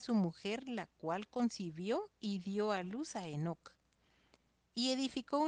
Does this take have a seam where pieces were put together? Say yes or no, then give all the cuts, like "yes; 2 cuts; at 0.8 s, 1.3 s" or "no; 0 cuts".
no; 0 cuts